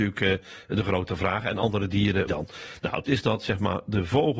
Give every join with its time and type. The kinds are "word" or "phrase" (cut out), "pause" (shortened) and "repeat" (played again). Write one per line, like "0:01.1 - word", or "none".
0:02.3 - phrase
0:03.1 - word

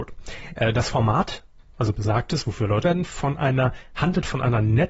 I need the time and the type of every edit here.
0:02.8 - word

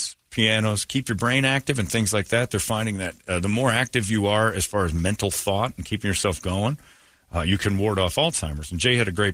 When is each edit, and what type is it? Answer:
none

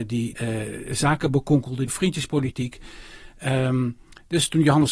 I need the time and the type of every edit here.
none

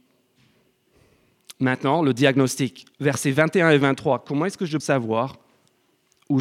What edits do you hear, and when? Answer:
0:02.9 - pause
0:04.8 - word

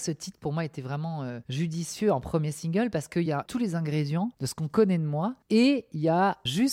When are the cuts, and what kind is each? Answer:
none

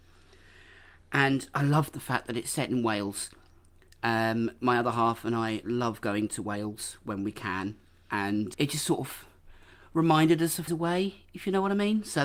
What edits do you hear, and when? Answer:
0:08.5 - word
0:10.7 - word

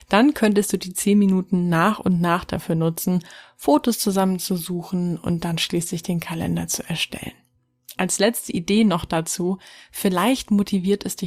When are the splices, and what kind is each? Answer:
none

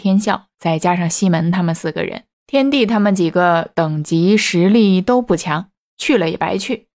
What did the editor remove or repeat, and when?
0:02.3 - pause

